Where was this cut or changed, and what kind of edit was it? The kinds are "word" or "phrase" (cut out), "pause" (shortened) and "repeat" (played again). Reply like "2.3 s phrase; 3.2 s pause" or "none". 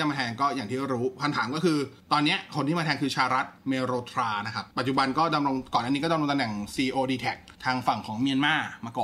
2.0 s pause; 3.6 s pause; 4.7 s pause; 7.6 s pause